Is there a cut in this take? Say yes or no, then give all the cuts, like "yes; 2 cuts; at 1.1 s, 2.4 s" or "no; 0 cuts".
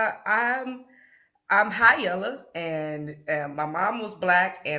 no; 0 cuts